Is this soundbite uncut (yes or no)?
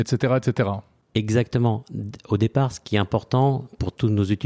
yes